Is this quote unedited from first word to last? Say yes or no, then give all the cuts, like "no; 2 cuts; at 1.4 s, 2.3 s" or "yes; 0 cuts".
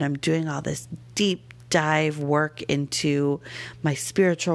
yes; 0 cuts